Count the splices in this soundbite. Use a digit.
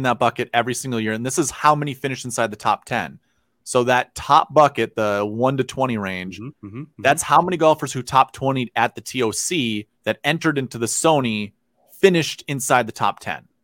1